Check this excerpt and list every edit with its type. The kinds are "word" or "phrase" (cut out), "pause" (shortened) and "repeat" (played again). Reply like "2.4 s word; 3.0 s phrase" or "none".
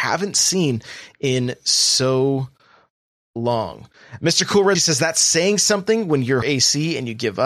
4.7 s word; 6.4 s word